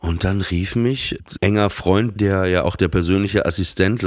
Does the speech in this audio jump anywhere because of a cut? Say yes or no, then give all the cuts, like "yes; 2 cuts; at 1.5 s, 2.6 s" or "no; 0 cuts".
yes; 2 cuts; at 1.4 s, 2.2 s